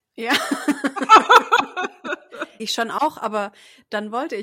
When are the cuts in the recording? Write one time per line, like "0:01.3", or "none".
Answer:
0:02.6